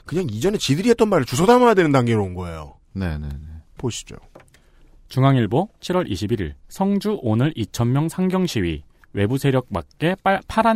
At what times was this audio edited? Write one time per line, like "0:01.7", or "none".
0:03.7
0:06.6
0:08.9